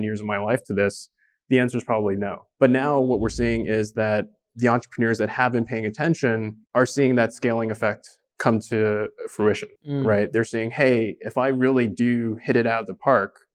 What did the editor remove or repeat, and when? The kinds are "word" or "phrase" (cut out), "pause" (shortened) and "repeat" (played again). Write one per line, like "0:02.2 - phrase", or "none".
0:06.6 - pause
0:09.8 - pause